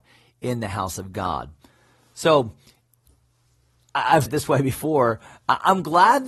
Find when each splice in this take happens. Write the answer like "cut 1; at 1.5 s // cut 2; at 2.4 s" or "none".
cut 1; at 4.3 s